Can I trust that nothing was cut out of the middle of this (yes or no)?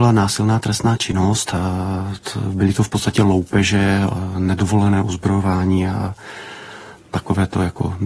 yes